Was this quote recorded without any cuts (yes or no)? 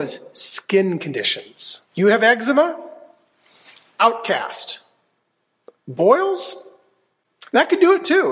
no